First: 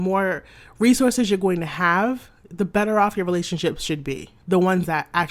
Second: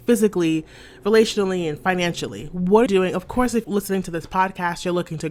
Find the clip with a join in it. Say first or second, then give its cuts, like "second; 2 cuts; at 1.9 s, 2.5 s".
second; 2 cuts; at 2.9 s, 3.6 s